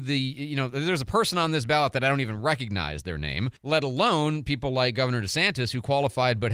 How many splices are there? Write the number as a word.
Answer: one